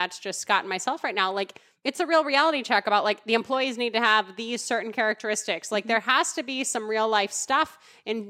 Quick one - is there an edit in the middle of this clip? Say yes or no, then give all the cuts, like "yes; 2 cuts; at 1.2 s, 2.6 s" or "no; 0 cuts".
no; 0 cuts